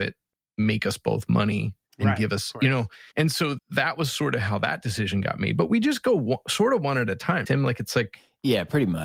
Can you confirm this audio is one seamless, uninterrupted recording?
no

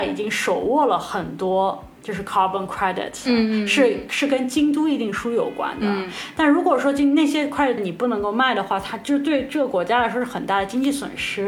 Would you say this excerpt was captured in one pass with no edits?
no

